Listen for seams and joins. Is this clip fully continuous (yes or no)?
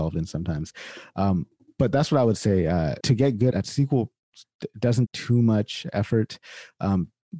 no